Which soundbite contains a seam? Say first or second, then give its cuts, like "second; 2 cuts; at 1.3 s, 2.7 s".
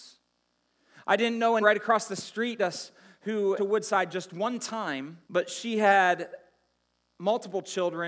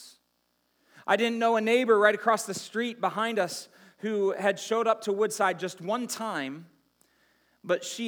first; 4 cuts; at 1.6 s, 2.6 s, 3.6 s, 5.2 s